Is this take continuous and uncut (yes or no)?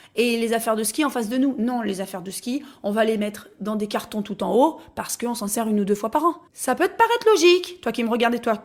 no